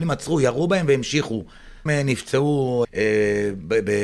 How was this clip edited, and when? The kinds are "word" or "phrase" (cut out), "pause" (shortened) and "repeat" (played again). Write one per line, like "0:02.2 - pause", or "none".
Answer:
0:01.9 - phrase
0:02.8 - word